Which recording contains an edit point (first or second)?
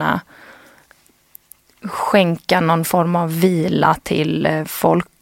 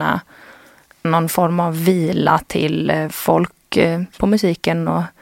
second